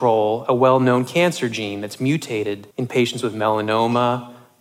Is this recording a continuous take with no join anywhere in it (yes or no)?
no